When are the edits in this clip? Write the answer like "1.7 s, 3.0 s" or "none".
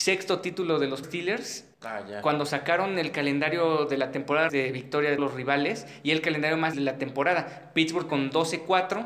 1.0 s, 1.7 s, 4.5 s, 5.2 s, 6.7 s, 8.1 s